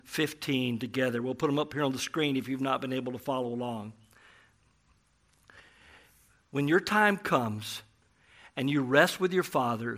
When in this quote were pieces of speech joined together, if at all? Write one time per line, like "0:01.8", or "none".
none